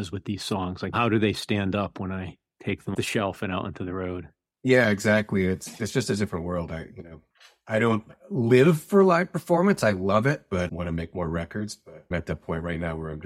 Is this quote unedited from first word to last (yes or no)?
no